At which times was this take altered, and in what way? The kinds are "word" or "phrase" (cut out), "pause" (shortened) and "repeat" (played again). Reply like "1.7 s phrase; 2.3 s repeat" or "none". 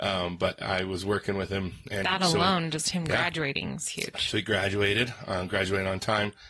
none

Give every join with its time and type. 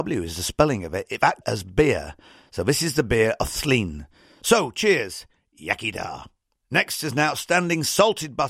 1.4 s word

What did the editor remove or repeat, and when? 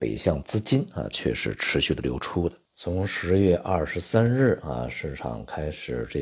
2.6 s pause

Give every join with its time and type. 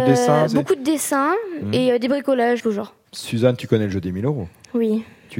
2.6 s word

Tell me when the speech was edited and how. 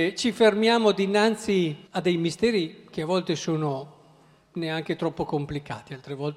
1.9 s pause

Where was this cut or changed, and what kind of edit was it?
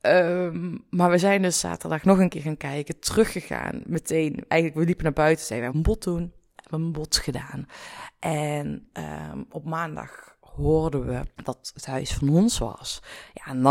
5.7 s phrase; 11.3 s pause

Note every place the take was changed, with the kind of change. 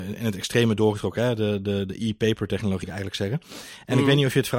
2.8 s word

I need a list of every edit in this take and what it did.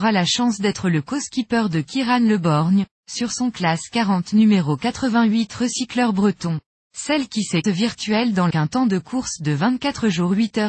6.8 s pause; 7.6 s phrase; 8.5 s phrase

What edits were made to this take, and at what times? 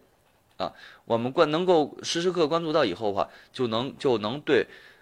none

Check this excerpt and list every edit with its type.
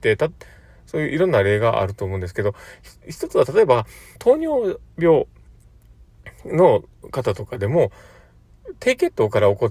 4.2 s phrase

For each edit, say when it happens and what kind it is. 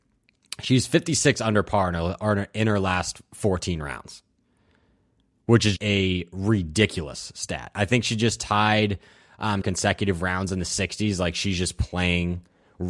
5.8 s word; 9.6 s phrase

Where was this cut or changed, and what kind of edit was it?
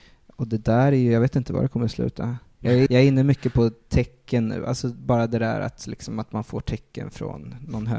2.9 s word

